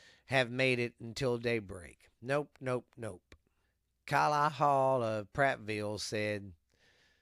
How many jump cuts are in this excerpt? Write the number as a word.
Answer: two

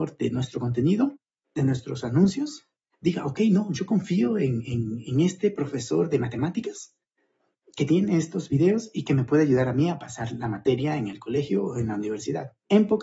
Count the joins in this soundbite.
zero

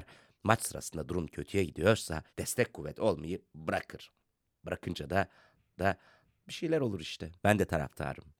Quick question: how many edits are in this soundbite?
three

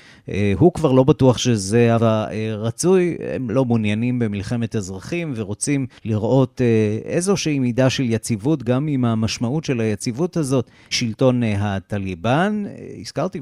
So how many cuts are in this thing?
three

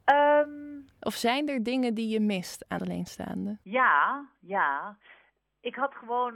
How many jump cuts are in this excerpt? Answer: two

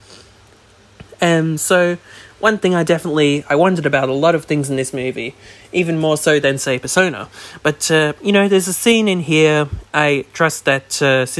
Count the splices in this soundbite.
zero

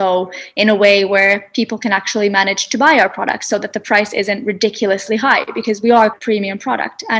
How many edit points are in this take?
one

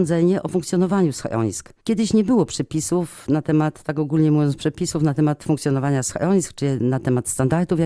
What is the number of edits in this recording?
one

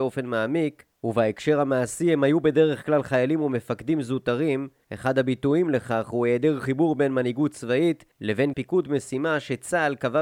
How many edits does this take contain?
one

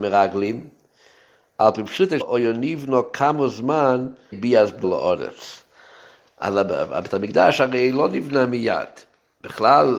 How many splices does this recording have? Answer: three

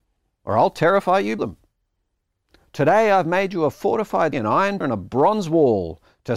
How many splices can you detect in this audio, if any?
three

